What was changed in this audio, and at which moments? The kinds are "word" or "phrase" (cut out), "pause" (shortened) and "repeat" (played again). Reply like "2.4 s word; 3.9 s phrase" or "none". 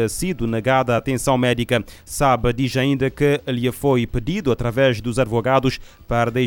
none